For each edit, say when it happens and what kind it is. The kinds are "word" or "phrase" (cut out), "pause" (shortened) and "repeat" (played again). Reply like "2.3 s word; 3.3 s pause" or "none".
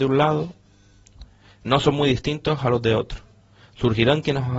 none